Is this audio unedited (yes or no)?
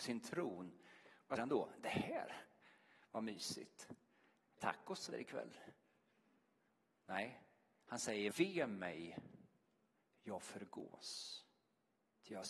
no